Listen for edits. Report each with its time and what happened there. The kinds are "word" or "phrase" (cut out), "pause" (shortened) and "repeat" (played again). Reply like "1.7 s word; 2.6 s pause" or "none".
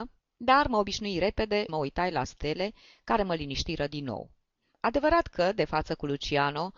1.7 s word